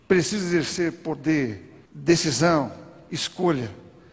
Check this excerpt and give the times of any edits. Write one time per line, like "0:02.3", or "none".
0:01.9